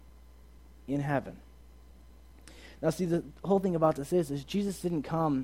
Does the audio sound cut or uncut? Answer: uncut